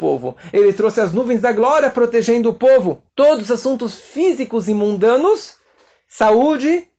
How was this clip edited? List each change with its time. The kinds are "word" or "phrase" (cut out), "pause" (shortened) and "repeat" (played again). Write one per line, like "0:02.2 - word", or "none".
0:03.1 - pause